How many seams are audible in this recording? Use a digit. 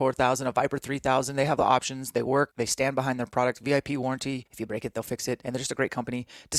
1